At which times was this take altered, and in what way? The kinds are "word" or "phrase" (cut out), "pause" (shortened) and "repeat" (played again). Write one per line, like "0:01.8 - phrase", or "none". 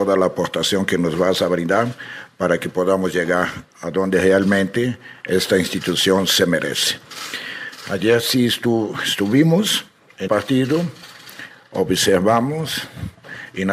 0:10.3 - word